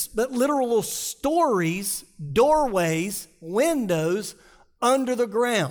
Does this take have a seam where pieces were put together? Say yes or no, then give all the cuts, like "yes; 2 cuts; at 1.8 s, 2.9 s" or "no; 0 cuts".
no; 0 cuts